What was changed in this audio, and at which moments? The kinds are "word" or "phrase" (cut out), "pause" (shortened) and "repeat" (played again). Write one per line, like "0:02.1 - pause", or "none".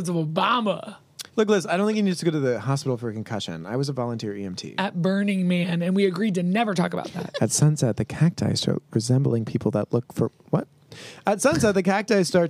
0:01.3 - pause